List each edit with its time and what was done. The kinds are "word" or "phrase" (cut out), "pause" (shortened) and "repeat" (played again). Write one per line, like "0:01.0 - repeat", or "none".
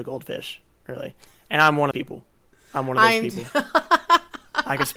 0:01.9 - phrase

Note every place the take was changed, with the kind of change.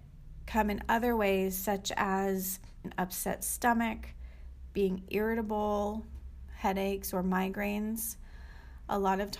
0:02.8 - word

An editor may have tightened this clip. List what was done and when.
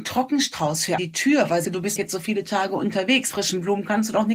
0:01.0 - word
0:01.6 - word
0:02.0 - word
0:03.3 - word

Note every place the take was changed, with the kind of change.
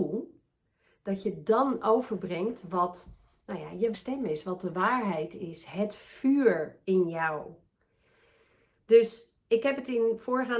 0:03.9 - word

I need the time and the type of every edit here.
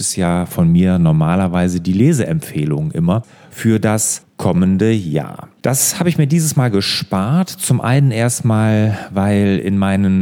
0:05.6 - pause

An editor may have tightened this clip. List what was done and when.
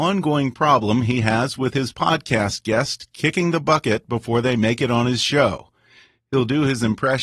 none

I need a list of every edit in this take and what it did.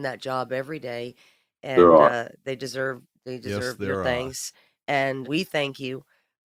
0:05.2 - word

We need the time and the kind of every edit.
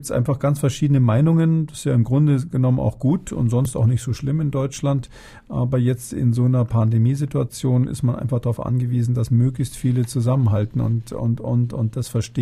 none

